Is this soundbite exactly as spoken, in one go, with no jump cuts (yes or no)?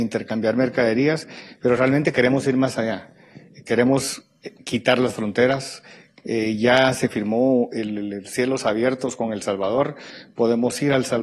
yes